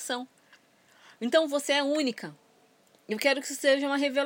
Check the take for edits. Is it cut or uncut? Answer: uncut